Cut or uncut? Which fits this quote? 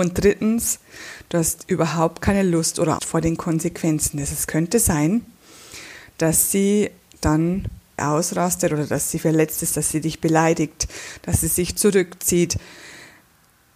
cut